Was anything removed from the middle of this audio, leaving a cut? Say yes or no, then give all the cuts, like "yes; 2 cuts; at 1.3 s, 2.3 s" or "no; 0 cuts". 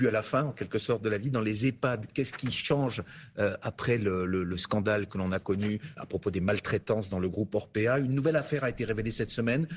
yes; 1 cut; at 6.0 s